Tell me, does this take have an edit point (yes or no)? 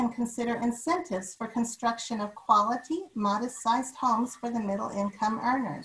no